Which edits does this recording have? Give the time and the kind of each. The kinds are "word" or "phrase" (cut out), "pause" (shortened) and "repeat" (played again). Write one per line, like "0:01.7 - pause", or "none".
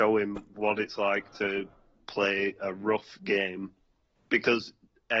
none